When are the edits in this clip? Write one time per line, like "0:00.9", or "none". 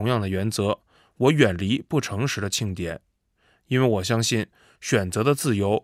none